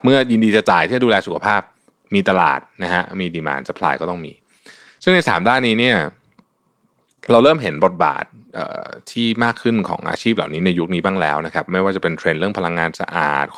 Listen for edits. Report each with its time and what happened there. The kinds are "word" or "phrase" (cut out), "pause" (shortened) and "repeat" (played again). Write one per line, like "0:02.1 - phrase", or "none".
none